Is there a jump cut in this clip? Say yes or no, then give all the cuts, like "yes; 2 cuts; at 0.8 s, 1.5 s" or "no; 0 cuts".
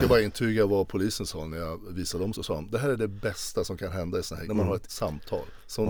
yes; 3 cuts; at 2.3 s, 4.4 s, 4.9 s